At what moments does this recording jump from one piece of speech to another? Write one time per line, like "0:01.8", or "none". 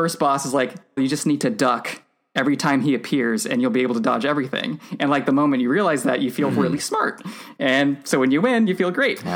0:01.0